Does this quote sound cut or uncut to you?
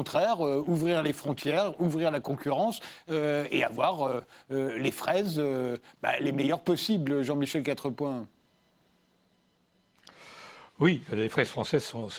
uncut